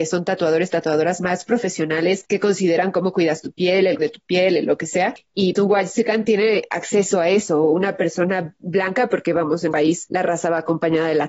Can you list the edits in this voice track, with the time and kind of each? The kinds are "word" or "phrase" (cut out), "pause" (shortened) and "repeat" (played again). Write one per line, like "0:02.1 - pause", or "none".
0:04.0 - word
0:05.5 - word
0:09.7 - word